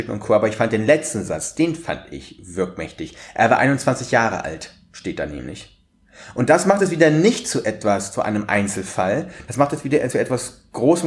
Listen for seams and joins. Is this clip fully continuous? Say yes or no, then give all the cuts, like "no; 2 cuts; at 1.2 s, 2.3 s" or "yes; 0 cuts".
yes; 0 cuts